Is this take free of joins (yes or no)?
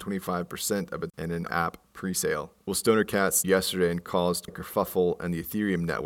no